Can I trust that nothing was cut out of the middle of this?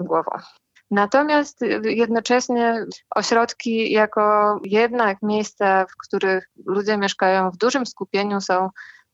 yes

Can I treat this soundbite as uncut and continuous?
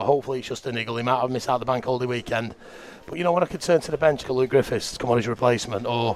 no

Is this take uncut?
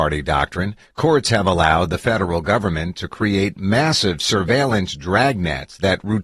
yes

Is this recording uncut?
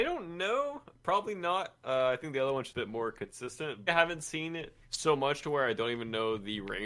no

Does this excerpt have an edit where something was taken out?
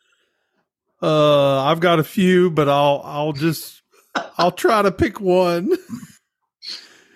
no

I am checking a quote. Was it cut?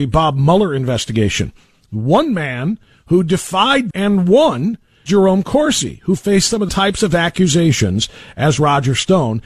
yes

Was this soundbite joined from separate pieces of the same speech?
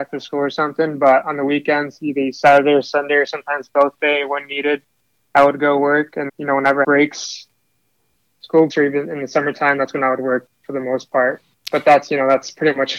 yes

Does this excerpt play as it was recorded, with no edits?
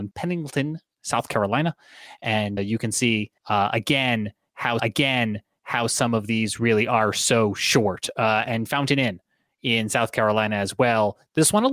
no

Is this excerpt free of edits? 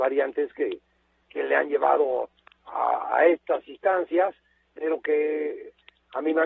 yes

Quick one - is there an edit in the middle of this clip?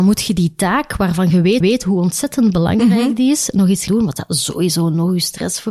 yes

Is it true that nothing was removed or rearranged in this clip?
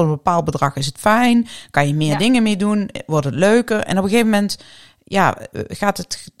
yes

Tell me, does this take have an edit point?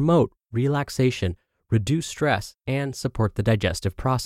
no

